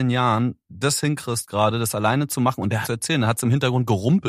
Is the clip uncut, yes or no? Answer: no